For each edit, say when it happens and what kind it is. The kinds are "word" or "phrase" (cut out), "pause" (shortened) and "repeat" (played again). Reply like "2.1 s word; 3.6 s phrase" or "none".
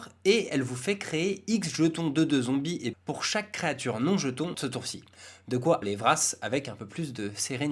2.9 s word; 4.5 s word; 5.8 s word